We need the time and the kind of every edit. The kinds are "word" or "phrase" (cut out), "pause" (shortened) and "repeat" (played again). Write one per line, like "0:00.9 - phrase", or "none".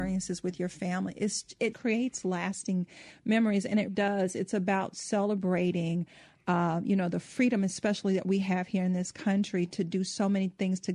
0:01.7 - word
0:03.9 - word